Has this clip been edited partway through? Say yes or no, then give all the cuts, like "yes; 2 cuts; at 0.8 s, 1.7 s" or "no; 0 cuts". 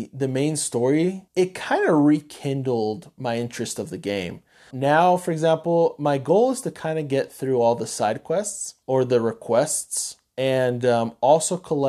yes; 3 cuts; at 1.3 s, 4.7 s, 8.8 s